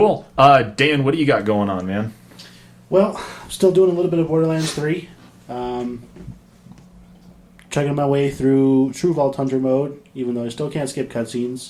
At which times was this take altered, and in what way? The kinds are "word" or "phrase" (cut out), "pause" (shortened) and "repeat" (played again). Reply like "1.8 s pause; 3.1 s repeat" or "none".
none